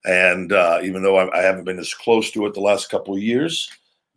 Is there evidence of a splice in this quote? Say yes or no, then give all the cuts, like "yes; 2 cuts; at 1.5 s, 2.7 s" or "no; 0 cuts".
no; 0 cuts